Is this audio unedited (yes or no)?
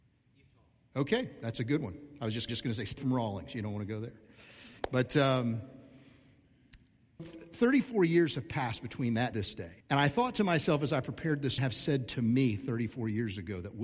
no